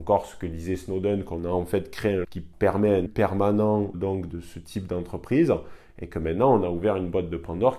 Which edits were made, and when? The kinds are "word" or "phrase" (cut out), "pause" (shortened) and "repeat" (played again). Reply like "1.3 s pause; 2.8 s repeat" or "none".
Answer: 2.2 s word; 3.1 s word; 3.9 s word; 4.3 s word